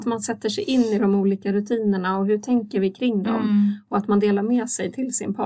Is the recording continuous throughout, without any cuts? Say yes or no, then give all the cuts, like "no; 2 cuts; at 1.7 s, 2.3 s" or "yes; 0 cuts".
yes; 0 cuts